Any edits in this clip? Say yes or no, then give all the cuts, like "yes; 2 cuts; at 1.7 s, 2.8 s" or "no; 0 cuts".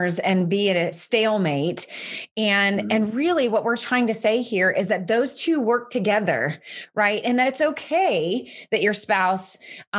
yes; 1 cut; at 0.9 s